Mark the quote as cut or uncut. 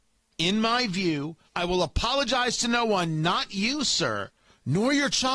cut